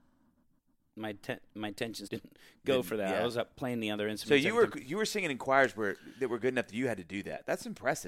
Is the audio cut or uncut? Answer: cut